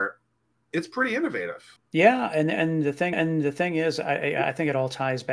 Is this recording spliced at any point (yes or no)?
yes